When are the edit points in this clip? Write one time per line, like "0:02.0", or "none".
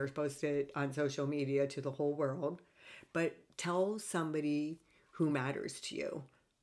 none